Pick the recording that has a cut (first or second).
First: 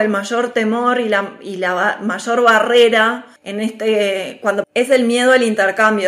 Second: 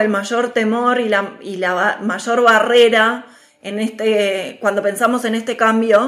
first